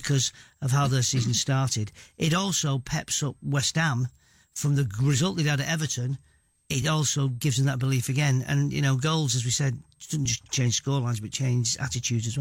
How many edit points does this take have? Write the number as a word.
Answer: zero